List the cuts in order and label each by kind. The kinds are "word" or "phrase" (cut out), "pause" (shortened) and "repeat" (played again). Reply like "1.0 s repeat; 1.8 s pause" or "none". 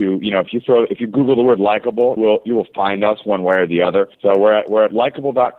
2.2 s word; 4.1 s pause